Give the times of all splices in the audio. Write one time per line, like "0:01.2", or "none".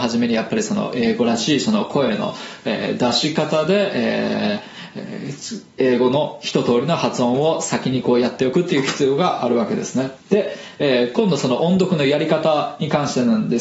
0:05.7
0:10.2